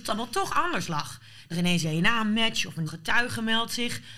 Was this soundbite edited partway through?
yes; 3 cuts; at 1.5 s, 1.8 s, 2.9 s

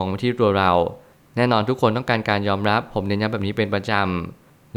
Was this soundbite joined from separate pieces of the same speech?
no; 0 cuts

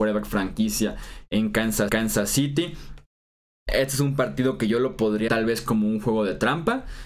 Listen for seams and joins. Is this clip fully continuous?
no; 2 cuts; at 1.9 s, 5.3 s

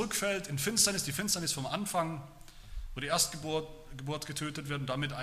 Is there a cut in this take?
no; 0 cuts

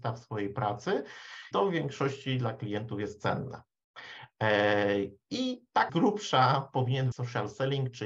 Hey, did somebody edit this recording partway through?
yes; 3 cuts; at 1.5 s, 5.9 s, 7.1 s

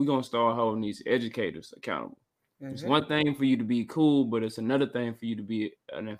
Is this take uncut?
yes; 0 cuts

